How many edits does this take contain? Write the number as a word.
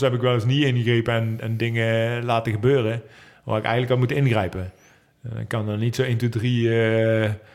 zero